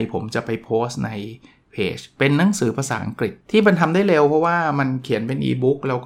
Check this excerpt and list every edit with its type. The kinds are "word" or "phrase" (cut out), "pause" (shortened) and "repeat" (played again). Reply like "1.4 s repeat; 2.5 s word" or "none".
3.4 s pause